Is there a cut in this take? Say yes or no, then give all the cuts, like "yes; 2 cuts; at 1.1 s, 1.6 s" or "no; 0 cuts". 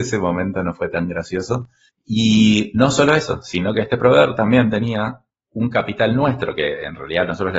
yes; 2 cuts; at 1.9 s, 5.3 s